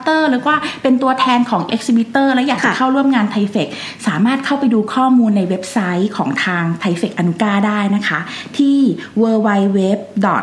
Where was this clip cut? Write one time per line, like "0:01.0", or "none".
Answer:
0:01.7

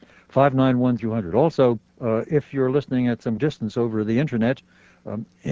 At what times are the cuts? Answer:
0:01.0
0:01.9
0:03.4

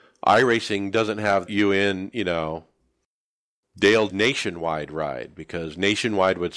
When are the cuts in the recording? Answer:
0:01.5
0:04.1

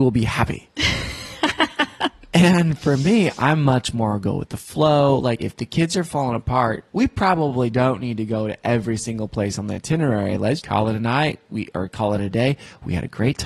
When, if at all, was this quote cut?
0:05.4
0:06.9
0:10.6

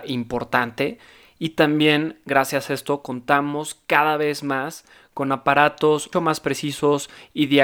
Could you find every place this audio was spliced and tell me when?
0:06.1

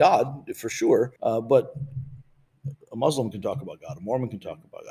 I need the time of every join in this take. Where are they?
0:01.2

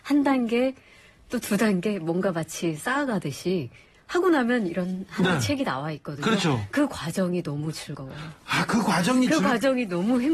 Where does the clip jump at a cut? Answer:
none

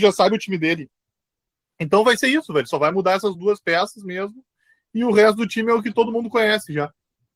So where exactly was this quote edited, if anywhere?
none

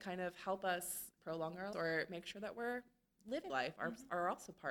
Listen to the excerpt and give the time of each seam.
0:01.2
0:01.7
0:03.5

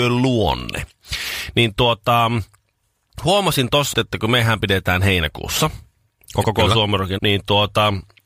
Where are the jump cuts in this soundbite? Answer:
0:03.9
0:06.4
0:07.2

